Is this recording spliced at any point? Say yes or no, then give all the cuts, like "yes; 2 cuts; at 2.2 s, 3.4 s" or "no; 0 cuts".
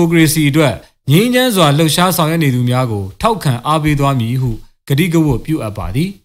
no; 0 cuts